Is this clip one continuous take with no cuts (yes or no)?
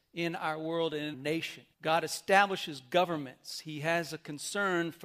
no